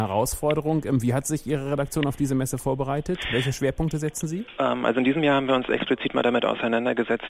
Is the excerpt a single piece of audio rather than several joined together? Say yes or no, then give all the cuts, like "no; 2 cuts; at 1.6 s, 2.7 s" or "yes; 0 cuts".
yes; 0 cuts